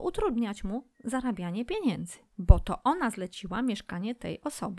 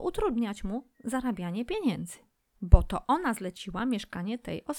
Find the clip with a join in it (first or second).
first